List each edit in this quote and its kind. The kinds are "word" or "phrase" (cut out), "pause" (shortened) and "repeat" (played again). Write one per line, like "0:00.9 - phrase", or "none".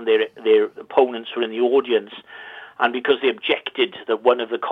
none